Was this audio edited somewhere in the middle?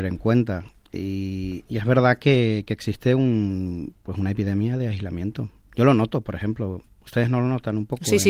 no; 0 cuts

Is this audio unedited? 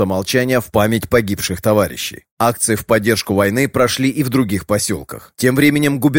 yes; 0 cuts

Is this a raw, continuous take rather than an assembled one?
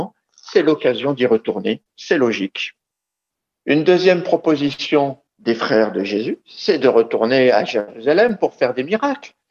no; 2 cuts; at 3.3 s, 5.3 s

